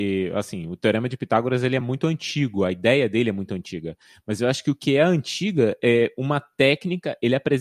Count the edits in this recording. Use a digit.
0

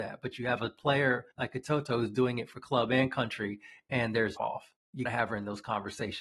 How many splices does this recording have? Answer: 3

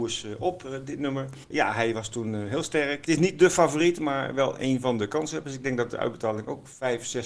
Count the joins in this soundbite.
1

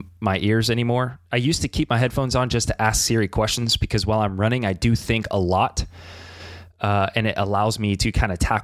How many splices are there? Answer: 0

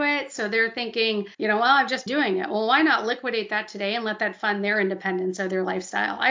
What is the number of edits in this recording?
2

